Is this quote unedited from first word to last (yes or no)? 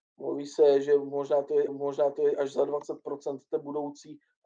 no